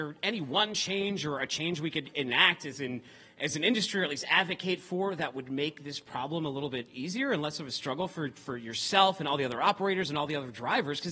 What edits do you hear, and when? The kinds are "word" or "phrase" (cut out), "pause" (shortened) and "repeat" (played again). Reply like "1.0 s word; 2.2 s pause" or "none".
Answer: none